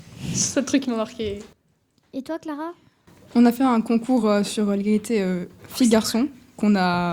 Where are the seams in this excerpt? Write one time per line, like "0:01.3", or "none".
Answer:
none